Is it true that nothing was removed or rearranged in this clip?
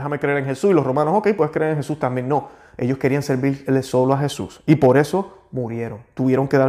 yes; 0 cuts

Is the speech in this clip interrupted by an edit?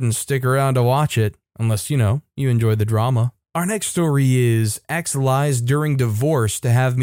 no; 0 cuts

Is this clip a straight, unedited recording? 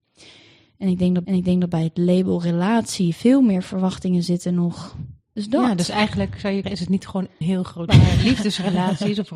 no; 5 cuts; at 1.2 s, 5.2 s, 6.6 s, 7.4 s, 7.9 s

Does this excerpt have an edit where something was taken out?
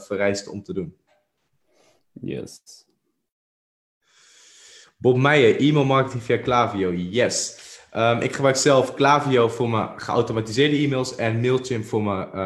no; 0 cuts

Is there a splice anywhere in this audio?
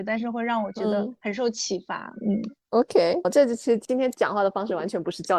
yes; 1 cut; at 3.2 s

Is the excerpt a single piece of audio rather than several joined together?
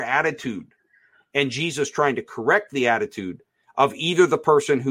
yes; 0 cuts

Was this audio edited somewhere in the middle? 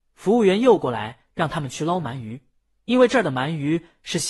no; 0 cuts

